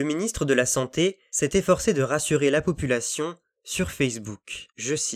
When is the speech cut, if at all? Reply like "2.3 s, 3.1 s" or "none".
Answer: none

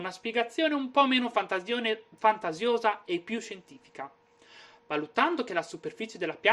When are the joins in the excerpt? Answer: none

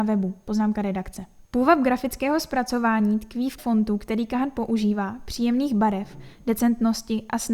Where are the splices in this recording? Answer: 1.4 s, 3.6 s

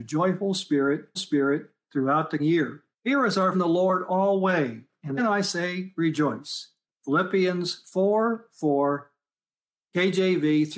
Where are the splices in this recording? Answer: 1.2 s, 2.4 s, 2.9 s, 3.5 s, 5.2 s, 6.9 s

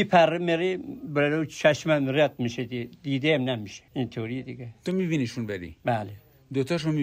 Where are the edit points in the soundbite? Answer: 3.9 s

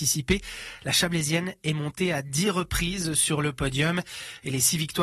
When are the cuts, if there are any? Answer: none

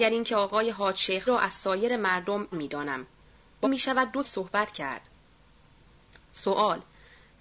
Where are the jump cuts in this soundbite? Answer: 1.3 s, 2.5 s, 3.6 s, 4.2 s

